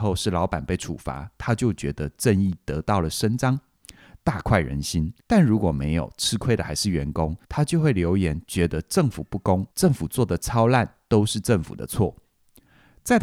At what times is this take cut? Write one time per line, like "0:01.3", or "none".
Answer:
0:05.2
0:07.4
0:09.7